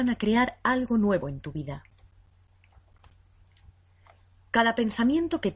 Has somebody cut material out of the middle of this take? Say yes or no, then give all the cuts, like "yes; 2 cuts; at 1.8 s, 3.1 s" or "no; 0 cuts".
no; 0 cuts